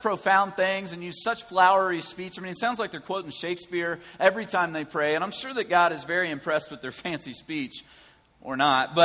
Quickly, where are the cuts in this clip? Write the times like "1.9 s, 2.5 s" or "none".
none